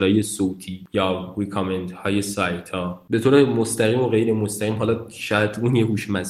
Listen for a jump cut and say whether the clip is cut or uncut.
uncut